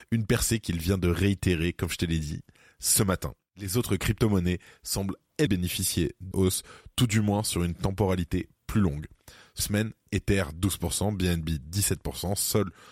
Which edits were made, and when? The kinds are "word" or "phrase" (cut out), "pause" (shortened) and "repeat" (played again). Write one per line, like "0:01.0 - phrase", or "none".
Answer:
0:05.5 - word
0:06.3 - word
0:09.6 - word